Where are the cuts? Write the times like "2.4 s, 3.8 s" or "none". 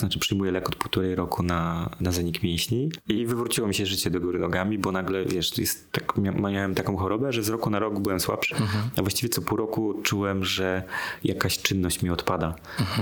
8.5 s